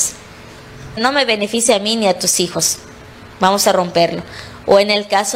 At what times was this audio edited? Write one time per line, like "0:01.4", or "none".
0:01.0